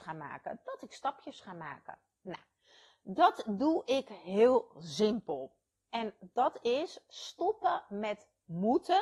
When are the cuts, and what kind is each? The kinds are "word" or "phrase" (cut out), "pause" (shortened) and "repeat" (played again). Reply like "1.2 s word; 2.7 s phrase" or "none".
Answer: none